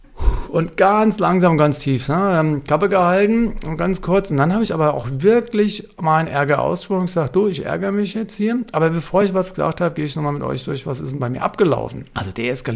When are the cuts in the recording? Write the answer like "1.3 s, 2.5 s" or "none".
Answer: none